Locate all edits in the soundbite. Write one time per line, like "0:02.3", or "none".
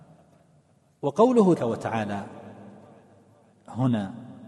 0:01.6